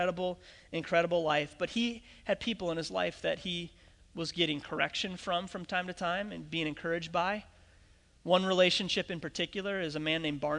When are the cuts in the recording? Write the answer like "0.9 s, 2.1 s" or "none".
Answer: none